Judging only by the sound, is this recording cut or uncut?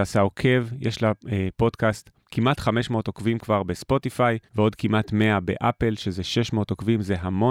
cut